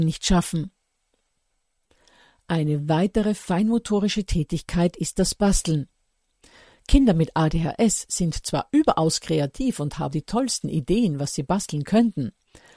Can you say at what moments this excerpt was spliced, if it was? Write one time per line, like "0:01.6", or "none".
0:10.1